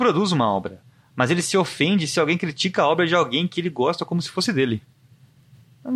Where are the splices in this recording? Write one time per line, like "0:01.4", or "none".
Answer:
none

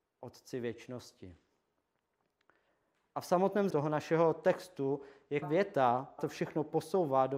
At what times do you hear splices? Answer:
0:03.7
0:05.4
0:06.2

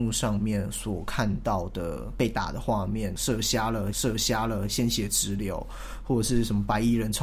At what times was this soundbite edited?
0:03.9

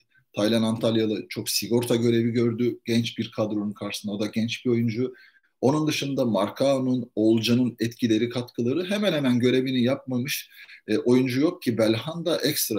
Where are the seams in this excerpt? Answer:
none

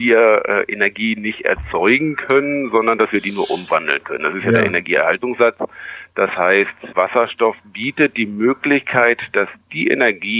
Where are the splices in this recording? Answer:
0:06.9

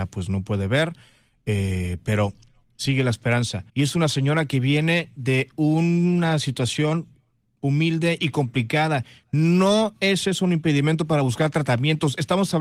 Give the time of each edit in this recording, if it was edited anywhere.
0:03.7

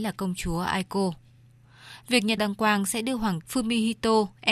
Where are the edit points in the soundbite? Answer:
0:02.4
0:03.4

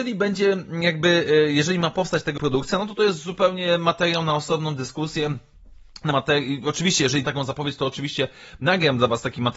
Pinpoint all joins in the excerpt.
0:02.4
0:06.1
0:07.2

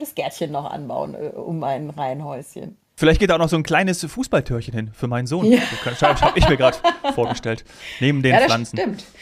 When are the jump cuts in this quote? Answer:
none

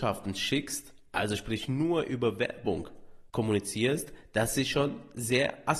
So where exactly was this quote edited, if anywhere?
0:03.3

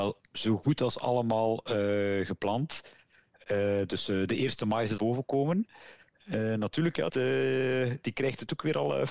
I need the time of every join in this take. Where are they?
0:05.0
0:07.1

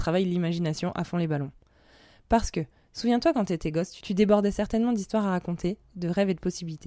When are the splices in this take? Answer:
none

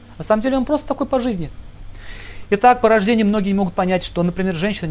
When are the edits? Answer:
none

